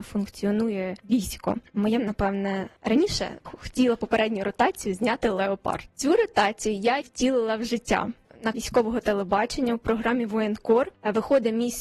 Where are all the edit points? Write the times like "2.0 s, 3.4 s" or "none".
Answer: 2.0 s, 3.4 s, 7.0 s, 8.5 s